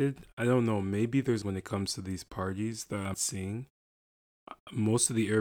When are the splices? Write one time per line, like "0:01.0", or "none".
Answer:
0:01.4
0:03.1

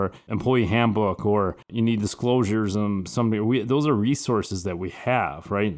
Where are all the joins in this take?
0:01.6

